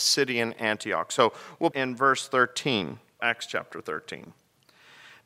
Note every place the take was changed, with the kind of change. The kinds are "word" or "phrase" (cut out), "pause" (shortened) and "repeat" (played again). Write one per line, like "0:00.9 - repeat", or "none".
0:01.7 - phrase
0:03.2 - word